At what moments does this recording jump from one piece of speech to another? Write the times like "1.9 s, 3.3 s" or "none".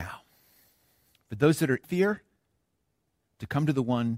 1.8 s